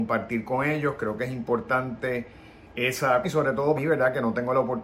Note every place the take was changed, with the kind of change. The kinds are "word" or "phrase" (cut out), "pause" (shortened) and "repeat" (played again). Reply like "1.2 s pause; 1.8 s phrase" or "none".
3.2 s word; 3.8 s word